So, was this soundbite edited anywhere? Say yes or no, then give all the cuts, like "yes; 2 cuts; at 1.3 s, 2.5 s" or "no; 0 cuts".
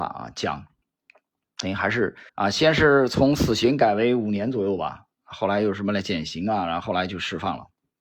yes; 1 cut; at 2.3 s